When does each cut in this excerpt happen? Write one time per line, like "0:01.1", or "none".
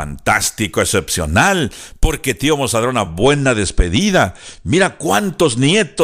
none

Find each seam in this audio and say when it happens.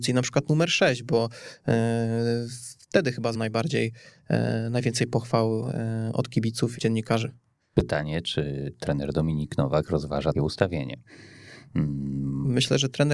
0:03.3
0:06.8
0:10.3

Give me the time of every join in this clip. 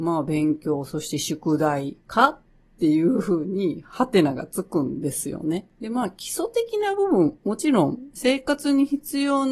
none

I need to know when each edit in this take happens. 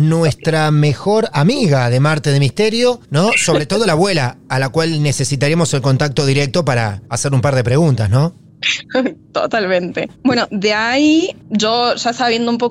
0:03.0
0:07.1
0:10.1
0:11.4

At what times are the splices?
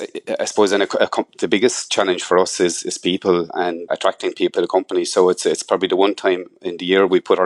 0:03.9
0:04.6

